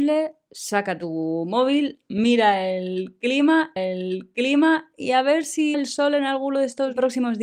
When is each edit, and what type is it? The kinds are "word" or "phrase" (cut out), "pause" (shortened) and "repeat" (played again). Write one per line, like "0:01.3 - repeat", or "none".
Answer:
0:03.8 - repeat
0:05.7 - word